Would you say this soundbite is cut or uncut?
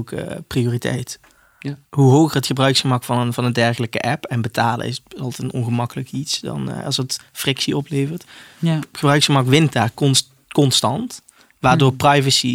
uncut